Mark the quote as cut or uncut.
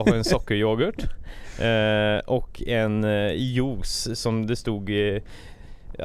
uncut